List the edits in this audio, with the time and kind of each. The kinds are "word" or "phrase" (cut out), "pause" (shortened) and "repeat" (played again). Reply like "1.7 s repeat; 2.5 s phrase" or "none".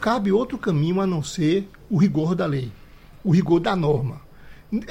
none